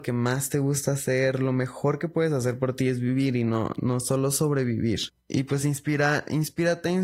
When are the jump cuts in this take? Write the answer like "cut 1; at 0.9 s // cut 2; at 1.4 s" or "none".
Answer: none